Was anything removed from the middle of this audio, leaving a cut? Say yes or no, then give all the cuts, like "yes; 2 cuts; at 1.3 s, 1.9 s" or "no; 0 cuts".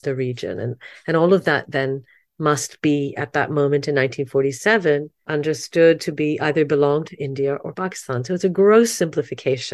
no; 0 cuts